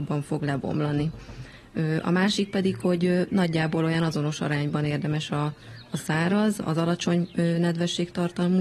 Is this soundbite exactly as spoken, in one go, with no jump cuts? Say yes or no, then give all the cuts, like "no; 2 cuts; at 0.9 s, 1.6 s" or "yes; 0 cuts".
no; 1 cut; at 6.6 s